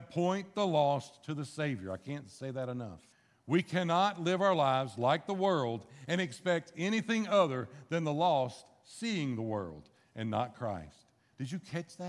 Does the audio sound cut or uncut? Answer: cut